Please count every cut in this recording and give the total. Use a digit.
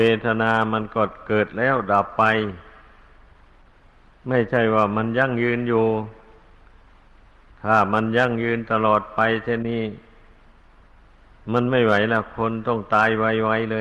0